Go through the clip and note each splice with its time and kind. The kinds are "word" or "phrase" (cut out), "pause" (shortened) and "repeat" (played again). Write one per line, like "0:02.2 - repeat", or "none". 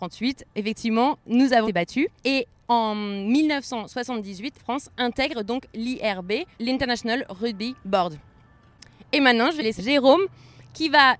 0:01.6 - word
0:02.2 - pause
0:04.6 - word
0:06.5 - word
0:07.8 - pause
0:09.8 - phrase